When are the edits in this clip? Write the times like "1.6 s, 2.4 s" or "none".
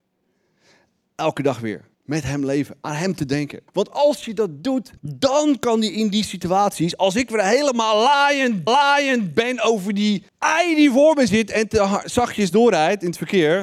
1.9 s, 3.7 s, 5.0 s, 8.7 s, 10.3 s